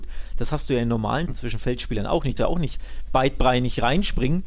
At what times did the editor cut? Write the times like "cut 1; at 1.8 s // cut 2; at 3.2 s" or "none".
cut 1; at 1.3 s // cut 2; at 2.4 s